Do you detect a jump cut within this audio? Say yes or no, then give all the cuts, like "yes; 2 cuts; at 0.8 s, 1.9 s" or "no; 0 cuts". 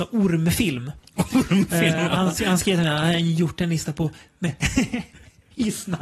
no; 0 cuts